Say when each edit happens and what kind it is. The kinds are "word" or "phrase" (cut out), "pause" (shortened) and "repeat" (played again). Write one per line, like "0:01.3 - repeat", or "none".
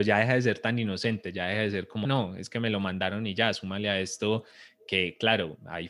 0:02.0 - word